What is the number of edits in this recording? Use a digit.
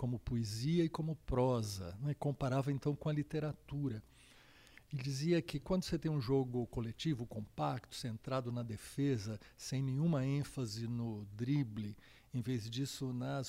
0